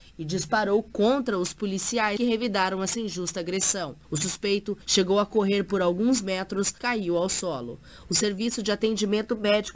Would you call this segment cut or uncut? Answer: cut